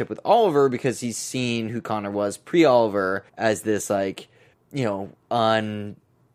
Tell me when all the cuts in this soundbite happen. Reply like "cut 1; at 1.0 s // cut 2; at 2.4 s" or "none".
cut 1; at 3.3 s // cut 2; at 4.5 s

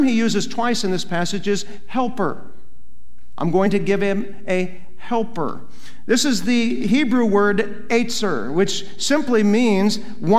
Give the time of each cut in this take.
none

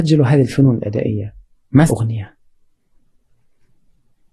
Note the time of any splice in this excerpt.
cut 1; at 1.9 s

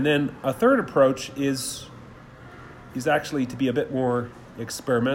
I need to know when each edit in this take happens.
none

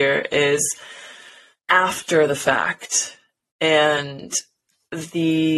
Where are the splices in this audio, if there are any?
none

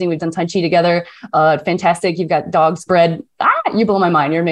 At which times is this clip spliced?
cut 1; at 2.9 s

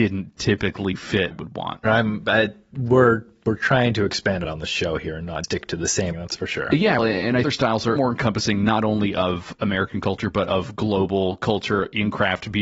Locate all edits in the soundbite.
cut 1; at 1.3 s // cut 2; at 4.4 s // cut 3; at 5.4 s // cut 4; at 6.1 s // cut 5; at 7.0 s // cut 6; at 7.4 s // cut 7; at 8.0 s

